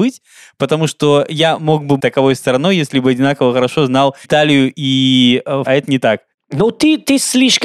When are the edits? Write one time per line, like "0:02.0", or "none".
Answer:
0:02.0
0:04.2
0:05.7